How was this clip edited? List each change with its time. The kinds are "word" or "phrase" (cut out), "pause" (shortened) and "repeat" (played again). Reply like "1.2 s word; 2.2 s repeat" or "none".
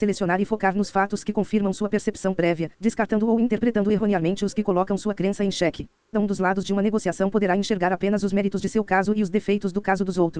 6.1 s word